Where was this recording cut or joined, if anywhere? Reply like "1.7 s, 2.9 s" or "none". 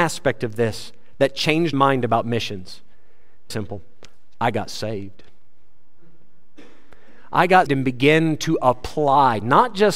1.7 s, 3.5 s, 7.7 s